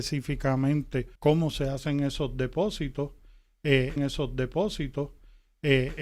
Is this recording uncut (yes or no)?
no